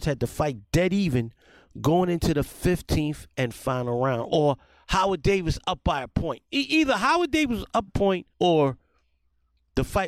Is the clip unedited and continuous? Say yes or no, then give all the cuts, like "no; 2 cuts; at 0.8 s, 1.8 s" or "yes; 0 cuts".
no; 2 cuts; at 7.9 s, 8.3 s